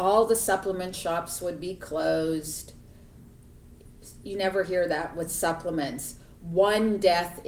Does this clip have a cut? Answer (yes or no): no